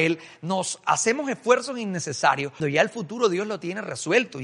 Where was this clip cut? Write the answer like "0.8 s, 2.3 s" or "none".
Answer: 2.6 s